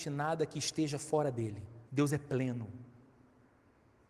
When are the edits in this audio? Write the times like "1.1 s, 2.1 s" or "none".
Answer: 1.8 s